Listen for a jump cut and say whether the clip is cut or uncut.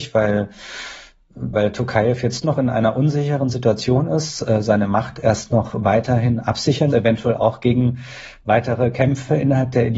cut